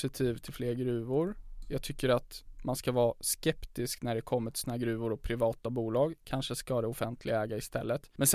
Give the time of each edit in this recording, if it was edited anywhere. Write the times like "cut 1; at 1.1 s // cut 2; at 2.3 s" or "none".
none

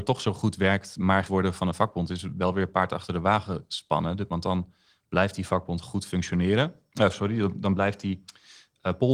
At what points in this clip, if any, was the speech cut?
cut 1; at 1.3 s // cut 2; at 6.9 s

